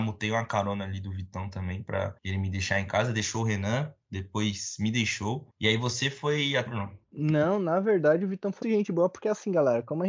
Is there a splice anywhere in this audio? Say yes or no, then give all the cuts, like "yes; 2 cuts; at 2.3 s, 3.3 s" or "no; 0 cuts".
yes; 5 cuts; at 2.2 s, 5.5 s, 6.7 s, 7.0 s, 8.6 s